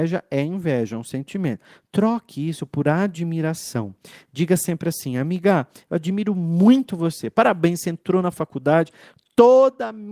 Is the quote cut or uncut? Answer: uncut